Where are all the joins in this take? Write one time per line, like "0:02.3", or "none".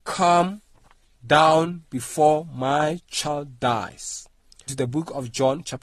0:04.7